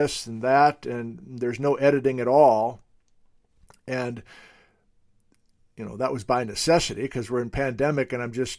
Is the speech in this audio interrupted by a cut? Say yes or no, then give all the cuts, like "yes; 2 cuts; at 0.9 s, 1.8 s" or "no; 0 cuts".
no; 0 cuts